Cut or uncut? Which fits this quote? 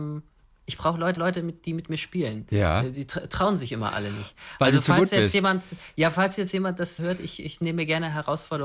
cut